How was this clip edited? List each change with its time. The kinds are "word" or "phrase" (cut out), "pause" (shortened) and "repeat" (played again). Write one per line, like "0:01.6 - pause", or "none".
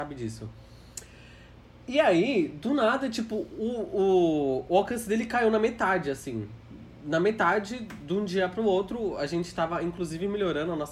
none

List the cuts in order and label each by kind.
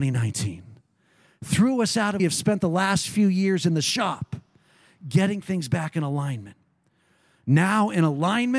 0:02.2 - phrase

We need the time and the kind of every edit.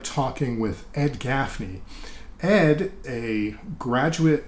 0:03.0 - word

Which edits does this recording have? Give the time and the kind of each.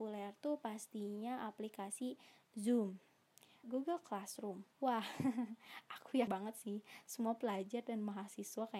0:03.6 - phrase
0:04.7 - pause
0:06.3 - word

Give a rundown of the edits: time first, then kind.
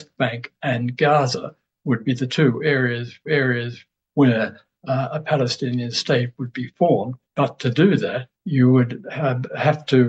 0:03.3 - repeat
0:07.2 - pause
0:08.3 - pause

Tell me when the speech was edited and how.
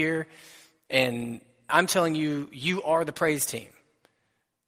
0:01.7 - phrase

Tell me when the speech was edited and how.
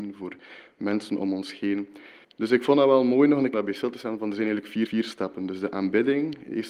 0:02.2 - pause
0:03.5 - word
0:04.9 - repeat

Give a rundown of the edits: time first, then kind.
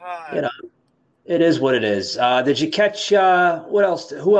none

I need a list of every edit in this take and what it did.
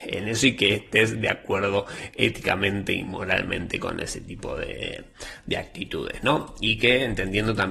none

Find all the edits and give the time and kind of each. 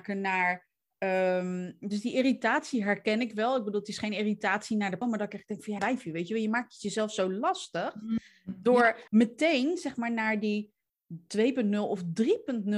0:05.0 - word
0:05.8 - word
0:09.1 - pause

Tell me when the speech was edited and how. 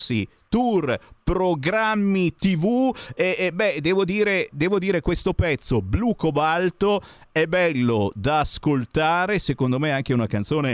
none

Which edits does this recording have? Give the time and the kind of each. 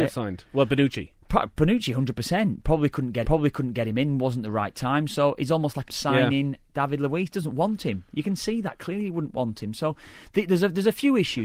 0:01.2 - pause
0:03.2 - repeat
0:05.9 - phrase

